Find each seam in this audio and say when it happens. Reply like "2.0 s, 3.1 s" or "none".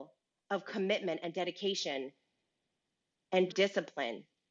3.5 s